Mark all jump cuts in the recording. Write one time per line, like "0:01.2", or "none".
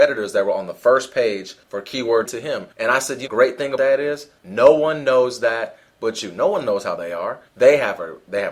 0:01.6
0:02.3
0:02.7
0:03.3
0:03.8
0:04.4
0:07.0
0:07.5